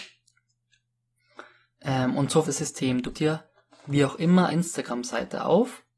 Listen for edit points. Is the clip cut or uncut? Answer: cut